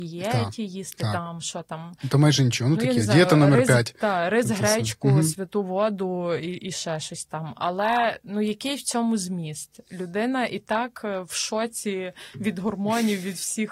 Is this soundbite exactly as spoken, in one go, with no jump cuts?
yes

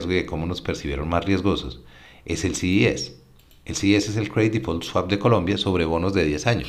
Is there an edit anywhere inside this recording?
no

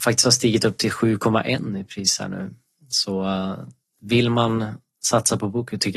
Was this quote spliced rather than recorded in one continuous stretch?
no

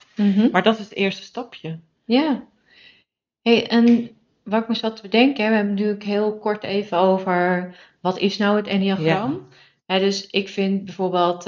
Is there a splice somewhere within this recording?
no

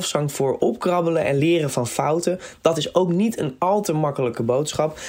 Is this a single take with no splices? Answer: yes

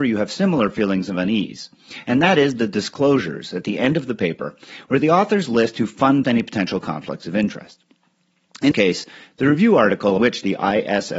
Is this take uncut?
no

